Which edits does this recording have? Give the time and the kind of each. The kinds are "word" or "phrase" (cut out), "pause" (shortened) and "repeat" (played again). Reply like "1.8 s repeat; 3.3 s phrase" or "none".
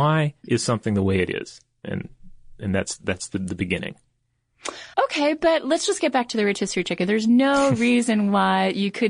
4.9 s pause